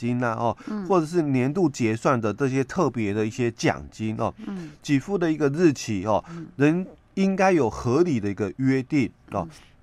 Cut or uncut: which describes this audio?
uncut